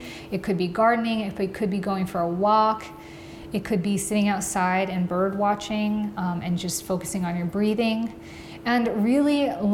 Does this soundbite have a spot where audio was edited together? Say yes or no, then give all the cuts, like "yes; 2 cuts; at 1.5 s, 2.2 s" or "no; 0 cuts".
no; 0 cuts